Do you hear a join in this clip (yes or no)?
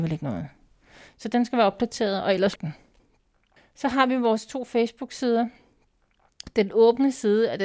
yes